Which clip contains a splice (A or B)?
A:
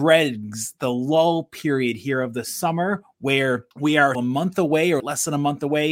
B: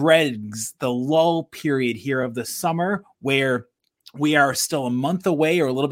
A